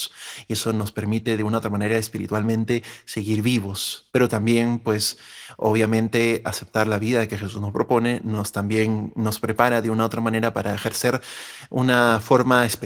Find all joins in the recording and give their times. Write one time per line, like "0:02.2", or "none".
0:04.1